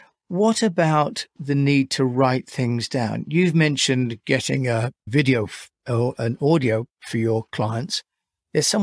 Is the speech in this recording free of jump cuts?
yes; 0 cuts

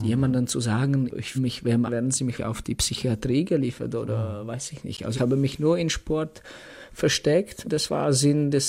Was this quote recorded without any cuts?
no; 5 cuts; at 1.3 s, 1.9 s, 2.4 s, 5.1 s, 7.6 s

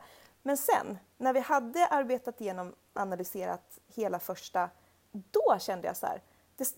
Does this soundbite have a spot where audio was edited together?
yes; 3 cuts; at 2.9 s, 3.9 s, 5.0 s

